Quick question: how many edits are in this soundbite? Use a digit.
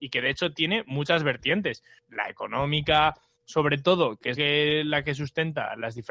1